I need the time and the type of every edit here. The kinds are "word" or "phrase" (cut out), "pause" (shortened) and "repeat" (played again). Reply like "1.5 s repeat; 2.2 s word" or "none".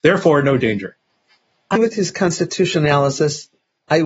1.8 s word